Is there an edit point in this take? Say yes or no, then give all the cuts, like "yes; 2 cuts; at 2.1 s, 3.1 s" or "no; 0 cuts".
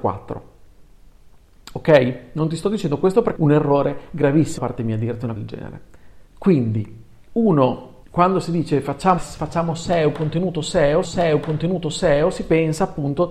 yes; 7 cuts; at 3.4 s, 4.6 s, 5.4 s, 6.3 s, 8.0 s, 9.2 s, 11.0 s